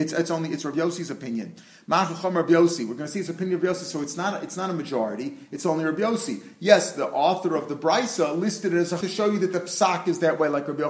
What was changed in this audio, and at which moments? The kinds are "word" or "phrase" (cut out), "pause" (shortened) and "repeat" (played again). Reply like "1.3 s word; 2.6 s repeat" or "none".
9.0 s word